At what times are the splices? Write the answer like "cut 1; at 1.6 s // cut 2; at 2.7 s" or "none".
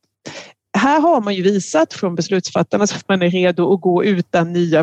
cut 1; at 2.9 s